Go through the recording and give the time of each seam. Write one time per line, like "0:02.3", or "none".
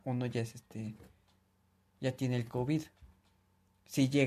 none